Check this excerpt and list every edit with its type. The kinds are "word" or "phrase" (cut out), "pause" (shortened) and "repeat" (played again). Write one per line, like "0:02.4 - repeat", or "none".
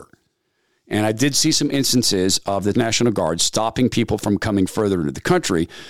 0:02.7 - word